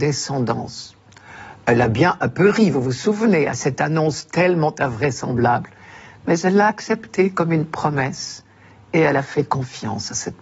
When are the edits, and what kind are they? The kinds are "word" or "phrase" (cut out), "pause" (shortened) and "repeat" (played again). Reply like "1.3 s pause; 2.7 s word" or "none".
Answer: none